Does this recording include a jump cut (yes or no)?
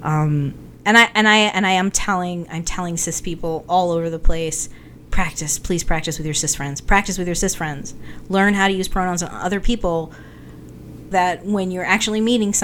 yes